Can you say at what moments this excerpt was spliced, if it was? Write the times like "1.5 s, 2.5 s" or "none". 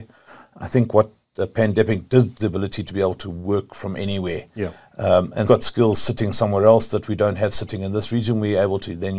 2.4 s, 5.5 s